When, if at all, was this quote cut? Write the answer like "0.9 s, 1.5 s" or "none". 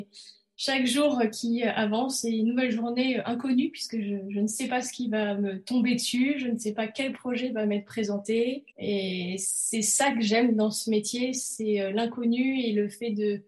8.7 s